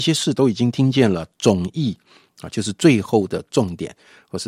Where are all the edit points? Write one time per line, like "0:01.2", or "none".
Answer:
none